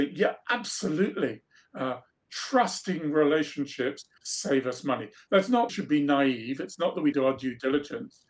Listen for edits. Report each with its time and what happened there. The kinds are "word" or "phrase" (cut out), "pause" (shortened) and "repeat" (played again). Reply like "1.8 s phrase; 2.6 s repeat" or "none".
4.2 s pause; 5.7 s phrase; 7.1 s word